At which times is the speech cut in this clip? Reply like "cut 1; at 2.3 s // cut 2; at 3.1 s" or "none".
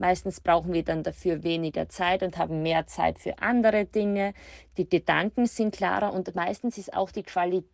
none